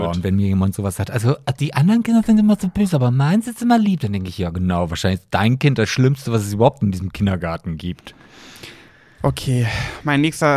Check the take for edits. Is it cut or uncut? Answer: uncut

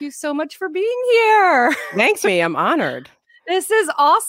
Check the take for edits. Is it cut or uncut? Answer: cut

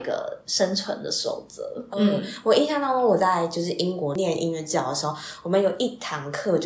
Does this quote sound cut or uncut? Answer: cut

